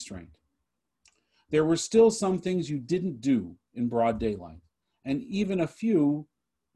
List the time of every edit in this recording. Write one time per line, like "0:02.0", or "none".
0:04.8